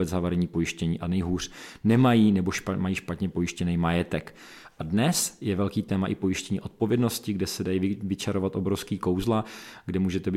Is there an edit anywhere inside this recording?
no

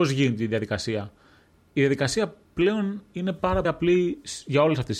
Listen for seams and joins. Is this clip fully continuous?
no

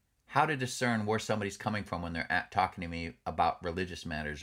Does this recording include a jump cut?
no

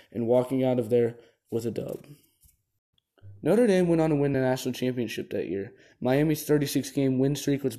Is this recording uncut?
yes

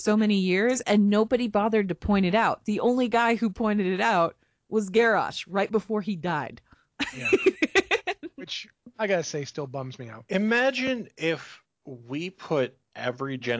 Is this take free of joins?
yes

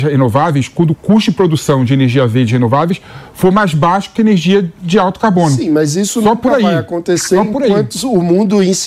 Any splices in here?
no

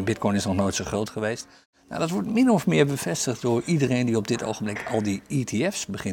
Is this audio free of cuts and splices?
yes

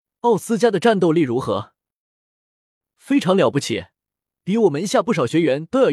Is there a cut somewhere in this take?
no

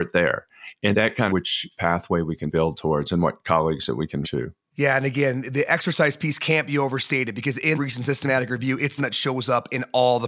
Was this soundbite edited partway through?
yes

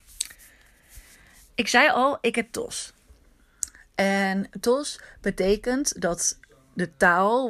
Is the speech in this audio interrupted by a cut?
no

